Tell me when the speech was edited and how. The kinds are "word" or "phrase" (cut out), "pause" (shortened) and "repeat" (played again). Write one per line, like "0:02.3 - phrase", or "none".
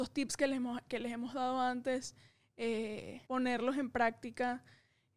0:03.3 - pause